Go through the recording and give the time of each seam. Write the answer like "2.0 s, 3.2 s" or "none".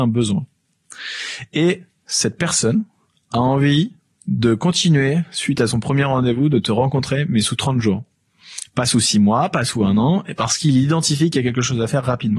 none